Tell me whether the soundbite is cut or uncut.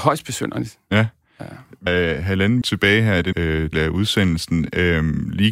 cut